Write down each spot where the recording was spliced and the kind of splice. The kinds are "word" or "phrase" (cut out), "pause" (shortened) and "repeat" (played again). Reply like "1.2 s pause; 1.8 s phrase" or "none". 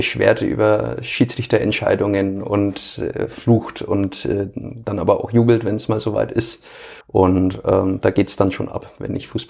7.0 s pause